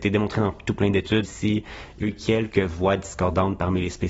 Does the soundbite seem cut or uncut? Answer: cut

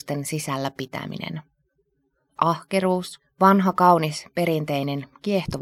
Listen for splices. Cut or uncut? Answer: uncut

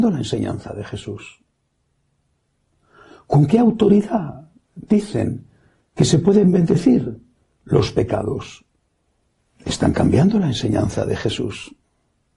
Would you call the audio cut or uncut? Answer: uncut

